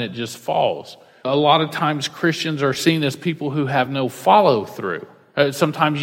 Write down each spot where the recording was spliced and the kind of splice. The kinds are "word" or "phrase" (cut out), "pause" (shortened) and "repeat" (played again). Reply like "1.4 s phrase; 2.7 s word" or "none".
none